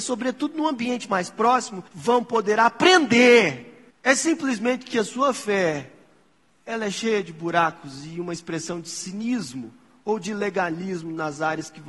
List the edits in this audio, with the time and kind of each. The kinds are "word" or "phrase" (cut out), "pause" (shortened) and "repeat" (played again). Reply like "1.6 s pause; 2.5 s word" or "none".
1.9 s pause; 3.9 s pause; 6.5 s pause